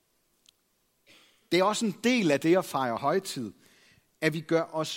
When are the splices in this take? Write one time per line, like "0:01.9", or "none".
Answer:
none